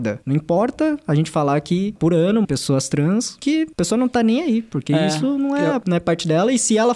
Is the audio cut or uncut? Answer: cut